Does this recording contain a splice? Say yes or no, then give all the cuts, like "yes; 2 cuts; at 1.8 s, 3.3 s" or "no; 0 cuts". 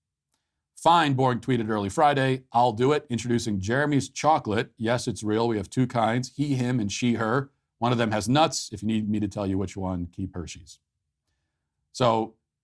yes; 1 cut; at 10.3 s